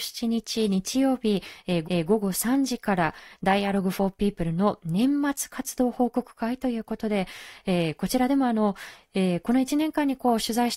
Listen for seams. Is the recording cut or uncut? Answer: cut